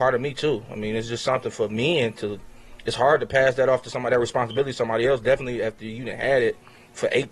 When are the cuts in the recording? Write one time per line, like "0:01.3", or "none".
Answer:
none